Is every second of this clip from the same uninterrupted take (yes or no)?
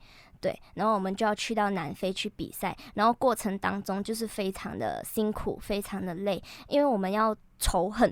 yes